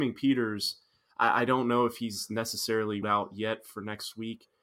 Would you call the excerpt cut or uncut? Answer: cut